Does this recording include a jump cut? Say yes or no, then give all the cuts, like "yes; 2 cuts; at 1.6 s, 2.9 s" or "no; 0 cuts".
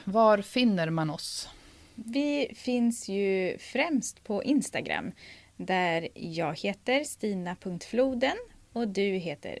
no; 0 cuts